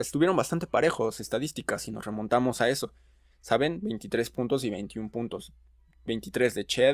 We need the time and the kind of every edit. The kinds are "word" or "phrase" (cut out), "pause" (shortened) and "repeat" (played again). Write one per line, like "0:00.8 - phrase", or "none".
0:01.2 - phrase